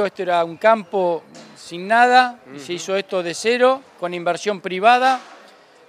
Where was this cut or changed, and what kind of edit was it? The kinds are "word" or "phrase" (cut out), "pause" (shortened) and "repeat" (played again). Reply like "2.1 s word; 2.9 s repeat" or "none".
none